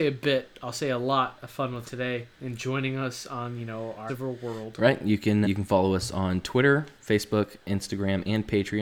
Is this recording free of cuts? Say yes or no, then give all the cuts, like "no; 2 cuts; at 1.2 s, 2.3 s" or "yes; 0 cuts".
no; 5 cuts; at 1.8 s, 2.3 s, 4.1 s, 5.4 s, 7.0 s